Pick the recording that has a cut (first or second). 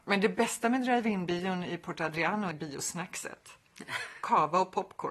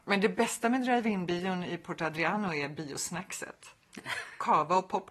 first